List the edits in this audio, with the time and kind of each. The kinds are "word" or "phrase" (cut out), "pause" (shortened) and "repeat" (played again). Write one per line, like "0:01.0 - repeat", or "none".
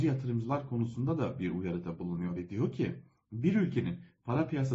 none